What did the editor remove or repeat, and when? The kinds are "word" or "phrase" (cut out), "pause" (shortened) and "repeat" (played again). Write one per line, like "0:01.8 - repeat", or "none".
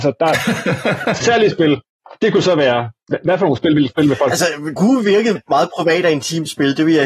0:01.2 - word
0:03.9 - word
0:04.8 - word
0:05.4 - word